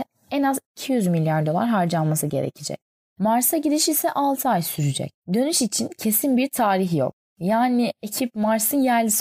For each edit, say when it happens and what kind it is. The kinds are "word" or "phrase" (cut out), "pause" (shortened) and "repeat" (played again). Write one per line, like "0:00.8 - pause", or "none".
0:02.9 - pause
0:05.2 - pause